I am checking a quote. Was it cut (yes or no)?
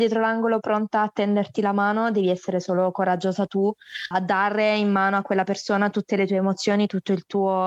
yes